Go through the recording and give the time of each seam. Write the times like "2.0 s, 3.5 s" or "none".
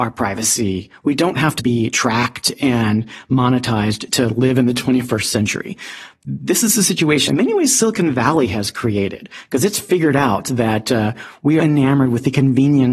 1.6 s, 4.1 s, 7.3 s, 11.6 s